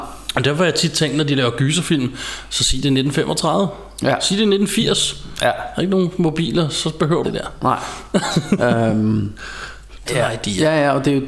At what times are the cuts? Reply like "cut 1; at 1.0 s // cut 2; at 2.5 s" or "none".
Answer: cut 1; at 7.2 s // cut 2; at 10.1 s